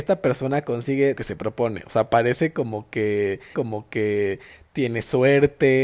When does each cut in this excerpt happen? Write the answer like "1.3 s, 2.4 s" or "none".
1.1 s, 3.5 s